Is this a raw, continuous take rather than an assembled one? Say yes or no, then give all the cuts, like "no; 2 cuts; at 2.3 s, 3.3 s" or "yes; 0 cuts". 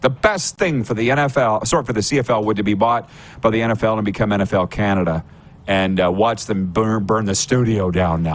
yes; 0 cuts